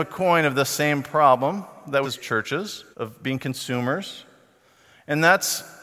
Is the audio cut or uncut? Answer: cut